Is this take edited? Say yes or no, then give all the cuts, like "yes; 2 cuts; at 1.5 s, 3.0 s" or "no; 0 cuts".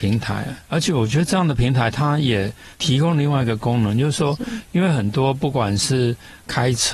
yes; 1 cut; at 2.7 s